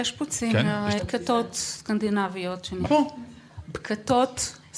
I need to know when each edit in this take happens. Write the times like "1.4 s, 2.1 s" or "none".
1.0 s, 2.8 s